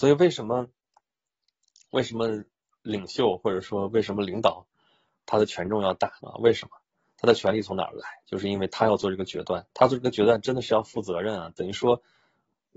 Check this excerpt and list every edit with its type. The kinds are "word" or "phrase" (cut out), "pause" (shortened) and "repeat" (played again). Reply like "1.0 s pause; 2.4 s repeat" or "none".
6.2 s pause; 9.7 s pause